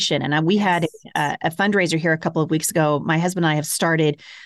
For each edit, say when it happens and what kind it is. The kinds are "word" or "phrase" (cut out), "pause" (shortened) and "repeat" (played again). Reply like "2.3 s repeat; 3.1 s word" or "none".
none